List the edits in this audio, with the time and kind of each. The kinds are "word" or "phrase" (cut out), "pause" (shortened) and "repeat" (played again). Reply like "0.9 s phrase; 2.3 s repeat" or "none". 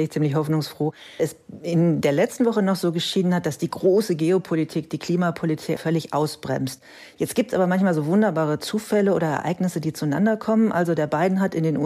1.2 s word; 5.8 s word